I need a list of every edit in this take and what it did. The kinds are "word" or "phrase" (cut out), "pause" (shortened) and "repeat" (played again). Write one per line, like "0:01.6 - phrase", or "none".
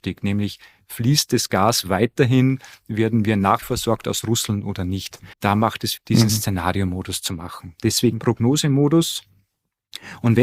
0:03.6 - phrase
0:05.3 - pause
0:06.0 - phrase